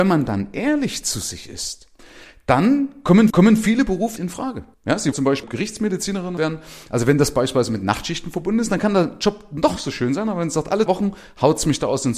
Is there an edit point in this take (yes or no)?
yes